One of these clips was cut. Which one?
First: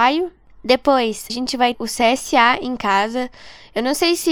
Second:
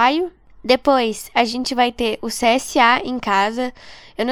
first; 2 cuts; at 1.3 s, 1.7 s

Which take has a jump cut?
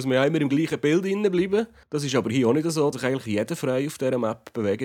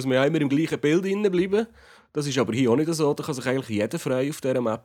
first; 2 cuts; at 1.8 s, 2.9 s

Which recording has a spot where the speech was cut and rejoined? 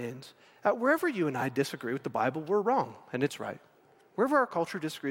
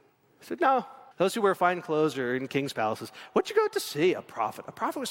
second; 1 cut; at 1.1 s

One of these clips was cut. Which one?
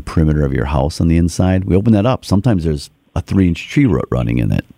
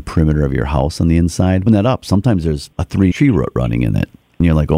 second; 3 cuts; at 1.7 s, 2.7 s, 3.1 s

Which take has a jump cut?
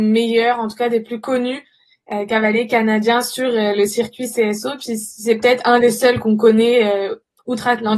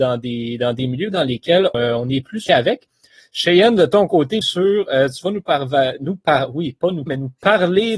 second; 4 cuts; at 1.7 s, 2.5 s, 4.4 s, 7.1 s

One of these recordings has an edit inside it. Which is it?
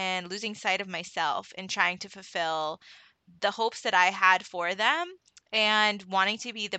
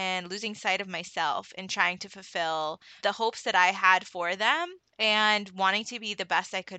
second; 2 cuts; at 3.0 s, 4.9 s

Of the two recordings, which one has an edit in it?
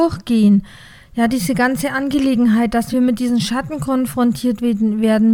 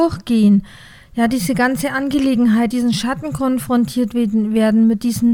second; 1 cut; at 2.7 s

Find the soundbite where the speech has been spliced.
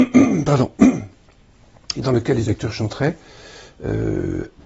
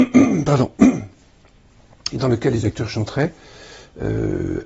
first; 1 cut; at 1.2 s

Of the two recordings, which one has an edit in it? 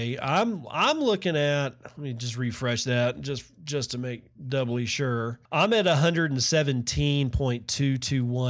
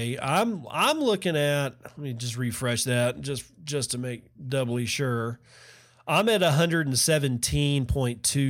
first; 1 cut; at 5.5 s

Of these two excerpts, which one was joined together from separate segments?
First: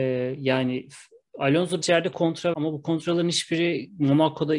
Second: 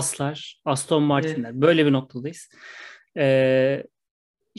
first; 2 cuts; at 1.8 s, 2.5 s

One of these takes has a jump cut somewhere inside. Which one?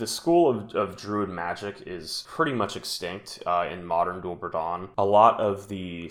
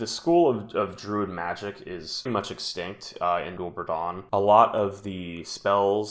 second; 2 cuts; at 2.3 s, 3.6 s

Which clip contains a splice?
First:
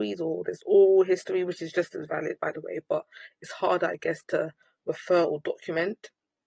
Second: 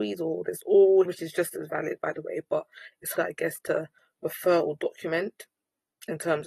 second; 2 cuts; at 1.1 s, 3.2 s

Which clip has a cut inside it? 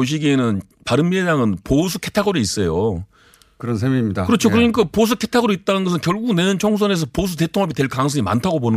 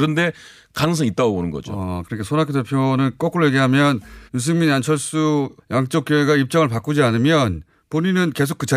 second; 2 cuts; at 4.3 s, 5.6 s

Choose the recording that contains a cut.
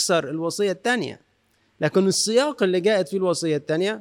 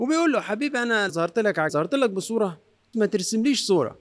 second; 3 cuts; at 1.1 s, 1.7 s, 2.9 s

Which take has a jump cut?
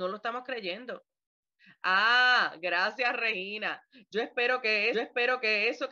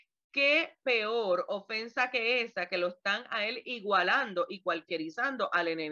first; 2 cuts; at 1.6 s, 4.9 s

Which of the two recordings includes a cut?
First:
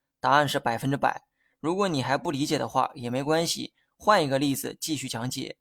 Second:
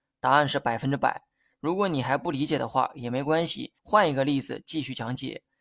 second; 1 cut; at 3.8 s

